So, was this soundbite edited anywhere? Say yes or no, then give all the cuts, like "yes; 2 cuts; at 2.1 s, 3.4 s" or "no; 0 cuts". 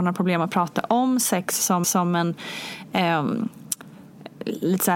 yes; 1 cut; at 1.8 s